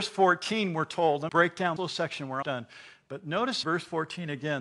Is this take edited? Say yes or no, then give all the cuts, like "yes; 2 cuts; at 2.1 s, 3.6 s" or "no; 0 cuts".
yes; 4 cuts; at 1.3 s, 1.8 s, 2.4 s, 3.6 s